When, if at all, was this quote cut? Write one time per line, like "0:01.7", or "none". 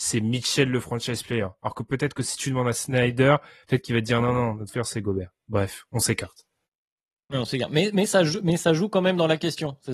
0:04.7